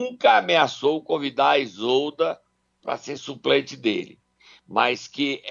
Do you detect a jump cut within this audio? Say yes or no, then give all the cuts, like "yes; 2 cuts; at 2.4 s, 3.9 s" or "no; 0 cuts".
no; 0 cuts